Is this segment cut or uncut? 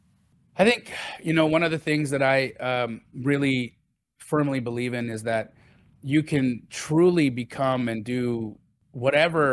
uncut